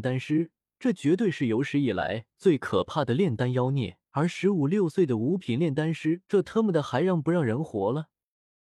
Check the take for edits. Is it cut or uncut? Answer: cut